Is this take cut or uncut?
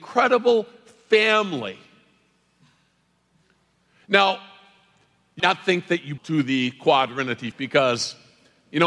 cut